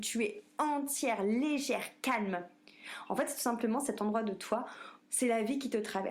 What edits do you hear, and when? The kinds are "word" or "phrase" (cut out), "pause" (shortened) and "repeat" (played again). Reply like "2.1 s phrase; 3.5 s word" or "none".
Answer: 5.0 s word